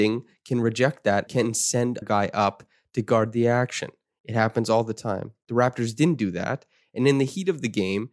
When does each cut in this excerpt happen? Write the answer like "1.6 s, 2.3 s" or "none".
1.3 s, 2.0 s